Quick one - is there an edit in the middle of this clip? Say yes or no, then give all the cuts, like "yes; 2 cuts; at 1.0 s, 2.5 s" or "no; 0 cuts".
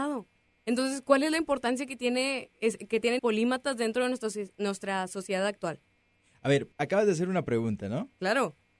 yes; 2 cuts; at 3.2 s, 6.7 s